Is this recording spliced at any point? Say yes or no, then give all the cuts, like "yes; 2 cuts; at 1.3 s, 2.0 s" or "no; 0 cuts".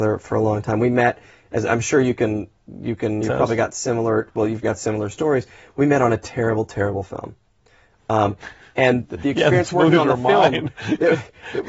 yes; 2 cuts; at 3.2 s, 4.6 s